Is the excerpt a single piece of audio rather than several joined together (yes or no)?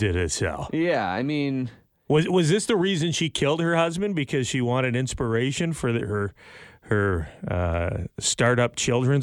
yes